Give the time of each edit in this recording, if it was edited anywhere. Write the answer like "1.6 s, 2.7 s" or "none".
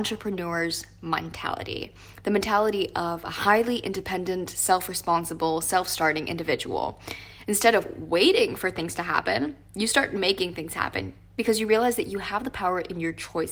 none